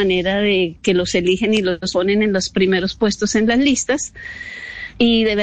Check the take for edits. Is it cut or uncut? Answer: uncut